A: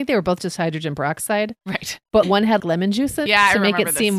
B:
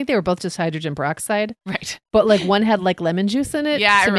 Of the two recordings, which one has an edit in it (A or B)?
A